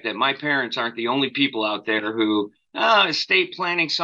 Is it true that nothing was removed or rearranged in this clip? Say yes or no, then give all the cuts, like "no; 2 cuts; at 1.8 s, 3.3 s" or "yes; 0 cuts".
yes; 0 cuts